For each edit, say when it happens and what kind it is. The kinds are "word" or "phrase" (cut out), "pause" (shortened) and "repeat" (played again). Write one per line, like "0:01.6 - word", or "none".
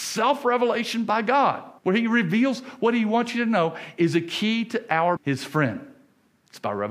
0:01.8 - pause
0:05.2 - word